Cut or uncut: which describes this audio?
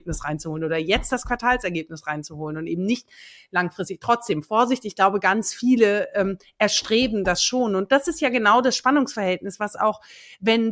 uncut